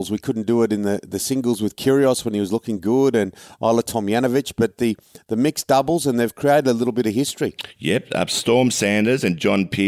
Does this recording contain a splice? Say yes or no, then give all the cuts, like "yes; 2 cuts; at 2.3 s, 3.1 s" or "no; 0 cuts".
no; 0 cuts